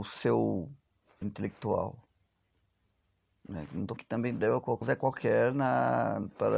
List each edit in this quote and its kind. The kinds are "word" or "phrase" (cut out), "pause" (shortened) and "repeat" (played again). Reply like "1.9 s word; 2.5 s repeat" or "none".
1.2 s word; 4.0 s word; 4.8 s word